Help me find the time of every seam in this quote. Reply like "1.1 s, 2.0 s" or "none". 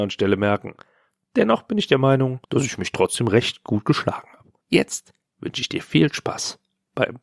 2.4 s, 4.6 s